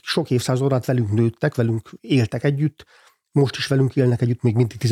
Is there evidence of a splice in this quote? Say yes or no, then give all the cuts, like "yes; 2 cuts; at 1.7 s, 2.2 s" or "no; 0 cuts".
no; 0 cuts